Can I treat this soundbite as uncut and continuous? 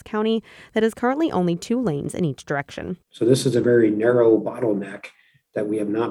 yes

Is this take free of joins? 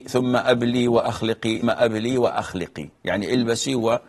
no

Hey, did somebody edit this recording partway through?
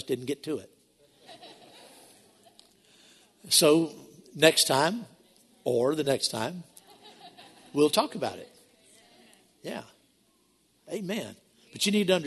no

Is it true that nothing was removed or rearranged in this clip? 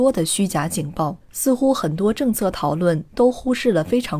no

